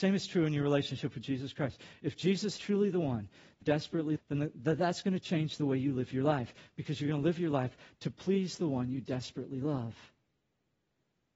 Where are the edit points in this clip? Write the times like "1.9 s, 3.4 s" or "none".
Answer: 2.6 s, 3.6 s, 4.2 s